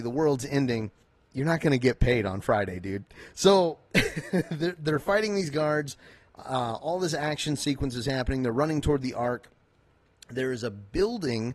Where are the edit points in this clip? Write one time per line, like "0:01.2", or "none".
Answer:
0:01.0